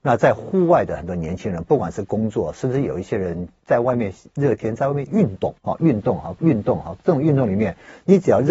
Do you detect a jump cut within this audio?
yes; 2 cuts; at 5.6 s, 6.4 s

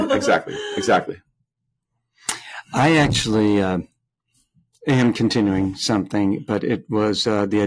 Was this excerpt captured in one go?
yes; 0 cuts

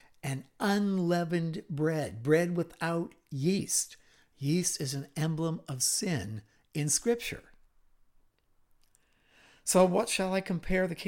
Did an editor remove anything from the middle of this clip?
no; 0 cuts

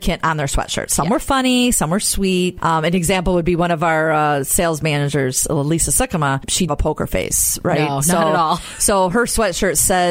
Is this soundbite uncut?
no; 1 cut; at 6.7 s

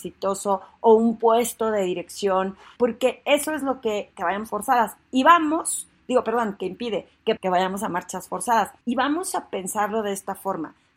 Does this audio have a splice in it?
yes; 5 cuts; at 2.8 s, 4.1 s, 4.5 s, 7.4 s, 8.8 s

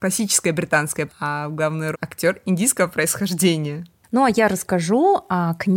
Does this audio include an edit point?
yes; 2 cuts; at 1.1 s, 1.9 s

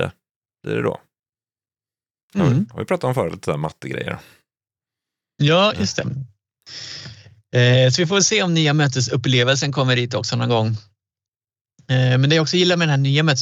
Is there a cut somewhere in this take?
no; 0 cuts

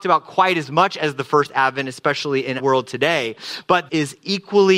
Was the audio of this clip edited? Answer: yes; 2 cuts; at 2.6 s, 3.9 s

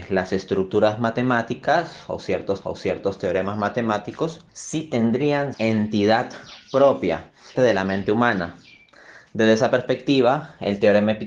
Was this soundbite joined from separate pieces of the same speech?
yes; 4 cuts; at 2.6 s, 4.5 s, 5.5 s, 7.5 s

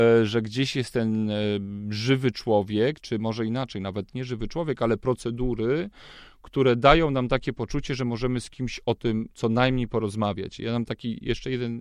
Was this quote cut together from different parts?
no; 0 cuts

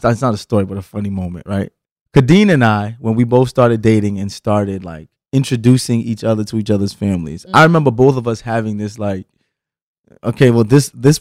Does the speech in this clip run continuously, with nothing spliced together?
no; 2 cuts; at 1.8 s, 5.1 s

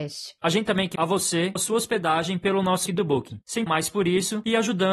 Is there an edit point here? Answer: yes; 4 cuts; at 1.0 s, 1.6 s, 2.9 s, 3.7 s

